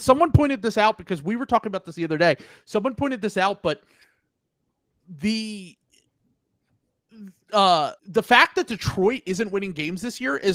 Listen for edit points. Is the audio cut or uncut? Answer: cut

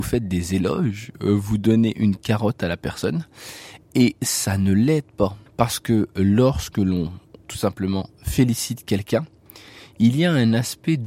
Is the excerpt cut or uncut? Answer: cut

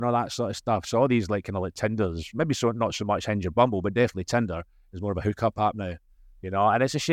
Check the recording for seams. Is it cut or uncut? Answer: uncut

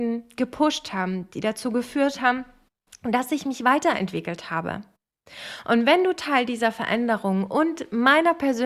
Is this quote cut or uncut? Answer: uncut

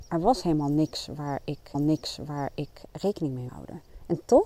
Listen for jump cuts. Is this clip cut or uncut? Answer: cut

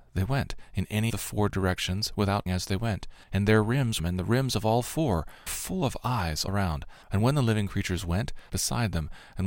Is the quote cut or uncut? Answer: cut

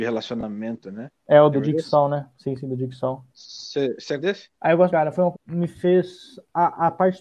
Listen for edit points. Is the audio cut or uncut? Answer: cut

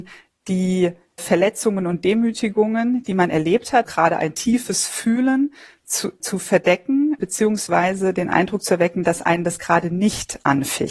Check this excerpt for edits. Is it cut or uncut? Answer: cut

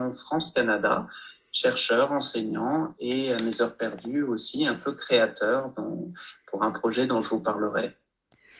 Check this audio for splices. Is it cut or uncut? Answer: uncut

